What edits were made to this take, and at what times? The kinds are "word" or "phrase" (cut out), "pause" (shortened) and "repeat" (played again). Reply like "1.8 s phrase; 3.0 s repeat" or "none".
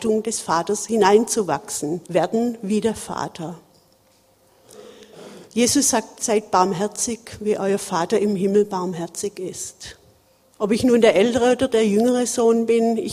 2.0 s pause; 5.4 s pause; 10.4 s pause